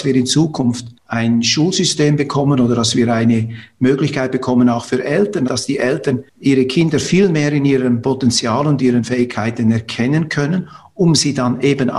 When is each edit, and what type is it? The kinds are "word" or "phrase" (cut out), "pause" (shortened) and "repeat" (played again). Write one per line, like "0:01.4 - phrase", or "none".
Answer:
0:01.0 - pause
0:06.3 - pause